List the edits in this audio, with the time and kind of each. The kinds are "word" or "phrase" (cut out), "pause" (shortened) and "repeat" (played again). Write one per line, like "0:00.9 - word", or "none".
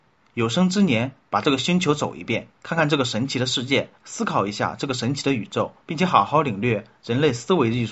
0:02.6 - pause
0:05.8 - pause